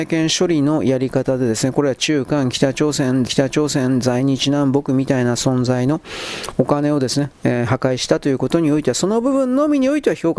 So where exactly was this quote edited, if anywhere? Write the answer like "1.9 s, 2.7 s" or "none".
3.3 s